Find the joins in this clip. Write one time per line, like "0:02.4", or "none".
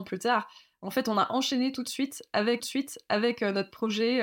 0:02.6